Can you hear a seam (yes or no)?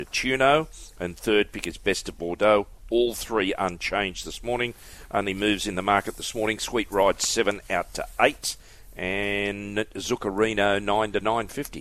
no